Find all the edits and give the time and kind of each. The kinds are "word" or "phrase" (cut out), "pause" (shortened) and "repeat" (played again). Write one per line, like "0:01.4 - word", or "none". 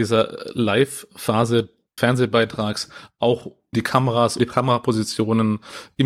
0:02.0 - word
0:03.7 - word
0:04.4 - word